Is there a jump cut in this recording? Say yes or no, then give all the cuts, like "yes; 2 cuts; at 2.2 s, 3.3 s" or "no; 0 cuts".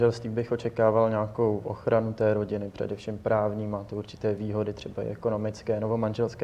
no; 0 cuts